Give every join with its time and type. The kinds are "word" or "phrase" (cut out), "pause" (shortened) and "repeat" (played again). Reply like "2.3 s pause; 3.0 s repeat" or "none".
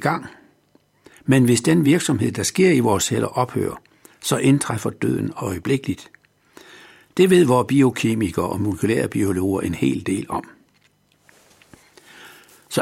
none